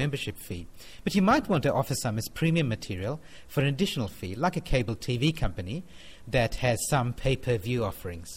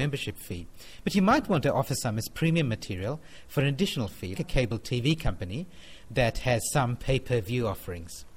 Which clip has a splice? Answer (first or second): second